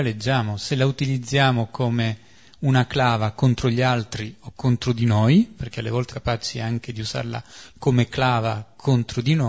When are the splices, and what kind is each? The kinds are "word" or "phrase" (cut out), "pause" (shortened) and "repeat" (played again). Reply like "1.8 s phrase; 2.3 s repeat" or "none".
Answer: 6.1 s word